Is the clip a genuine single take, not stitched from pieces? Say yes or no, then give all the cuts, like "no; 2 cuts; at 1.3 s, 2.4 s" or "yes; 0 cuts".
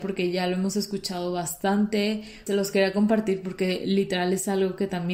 no; 1 cut; at 2.5 s